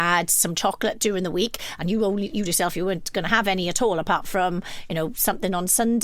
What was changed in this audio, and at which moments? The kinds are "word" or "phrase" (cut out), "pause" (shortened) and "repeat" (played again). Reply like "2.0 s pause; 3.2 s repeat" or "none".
2.4 s word